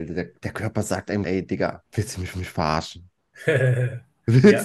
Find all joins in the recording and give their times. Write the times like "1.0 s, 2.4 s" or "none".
1.2 s, 1.9 s, 2.3 s